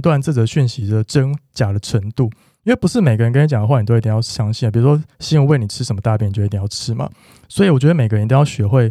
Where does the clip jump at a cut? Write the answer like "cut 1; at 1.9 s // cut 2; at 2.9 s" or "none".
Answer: none